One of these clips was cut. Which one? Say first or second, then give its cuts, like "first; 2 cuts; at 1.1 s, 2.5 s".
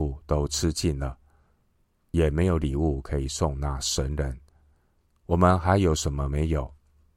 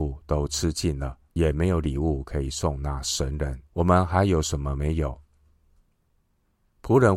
second; 2 cuts; at 1.2 s, 3.7 s